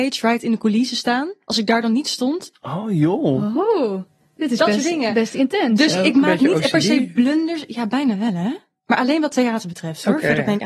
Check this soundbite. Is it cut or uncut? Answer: uncut